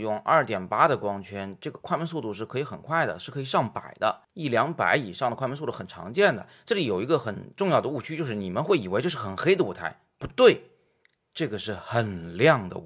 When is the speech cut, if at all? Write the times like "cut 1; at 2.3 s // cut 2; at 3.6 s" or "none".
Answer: cut 1; at 4.2 s